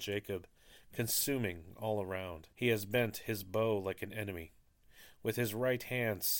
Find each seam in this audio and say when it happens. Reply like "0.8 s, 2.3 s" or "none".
2.5 s